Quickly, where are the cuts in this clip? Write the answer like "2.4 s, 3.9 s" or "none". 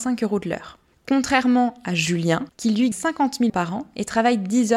2.5 s, 2.9 s, 3.5 s